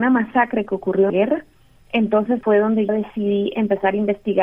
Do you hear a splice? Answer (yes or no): yes